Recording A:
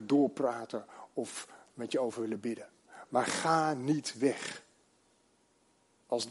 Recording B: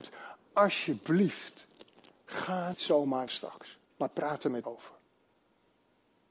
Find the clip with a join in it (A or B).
B